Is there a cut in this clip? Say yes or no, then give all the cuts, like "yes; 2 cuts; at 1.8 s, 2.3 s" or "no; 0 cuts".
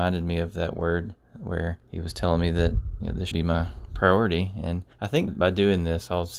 yes; 4 cuts; at 1.8 s, 3.3 s, 4.9 s, 5.3 s